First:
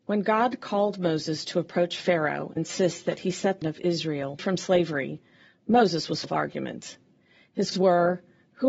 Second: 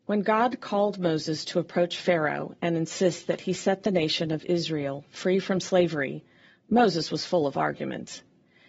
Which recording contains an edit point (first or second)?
first